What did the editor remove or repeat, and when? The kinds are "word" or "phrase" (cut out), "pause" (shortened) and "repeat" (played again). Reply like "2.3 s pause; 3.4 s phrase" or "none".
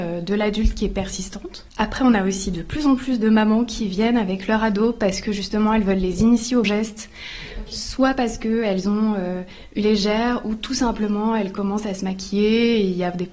1.7 s pause; 6.6 s word; 9.8 s word